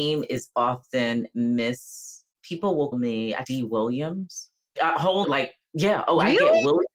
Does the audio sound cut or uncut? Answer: cut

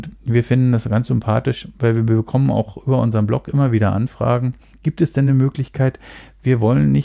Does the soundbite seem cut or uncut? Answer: uncut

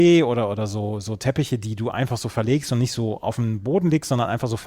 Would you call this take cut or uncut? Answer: uncut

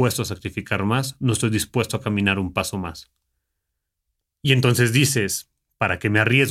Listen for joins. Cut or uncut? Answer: uncut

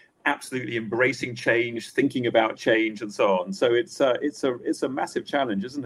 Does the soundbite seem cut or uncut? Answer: uncut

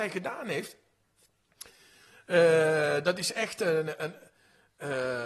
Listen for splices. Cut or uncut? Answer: uncut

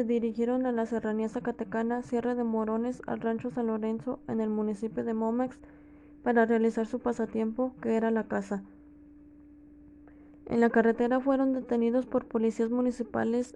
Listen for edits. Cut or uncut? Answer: uncut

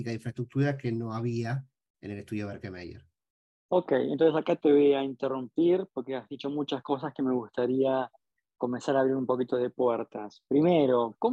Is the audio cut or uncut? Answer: uncut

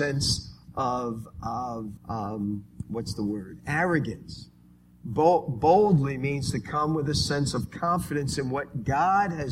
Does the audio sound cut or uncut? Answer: cut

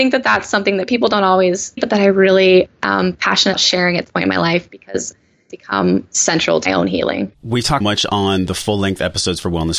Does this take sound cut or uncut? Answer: cut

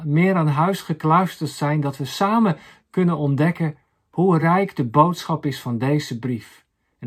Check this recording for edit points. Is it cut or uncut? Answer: uncut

